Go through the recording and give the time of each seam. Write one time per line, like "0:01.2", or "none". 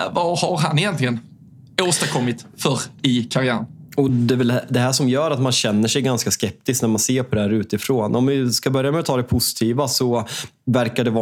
none